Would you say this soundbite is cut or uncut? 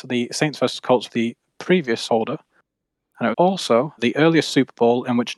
cut